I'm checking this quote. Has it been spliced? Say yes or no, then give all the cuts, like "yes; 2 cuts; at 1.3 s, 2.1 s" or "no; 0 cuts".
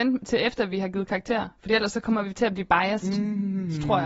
no; 0 cuts